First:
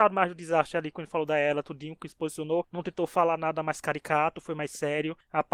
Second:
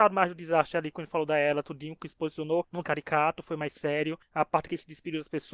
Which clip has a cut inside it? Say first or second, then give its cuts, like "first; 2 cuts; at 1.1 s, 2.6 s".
second; 1 cut; at 2.8 s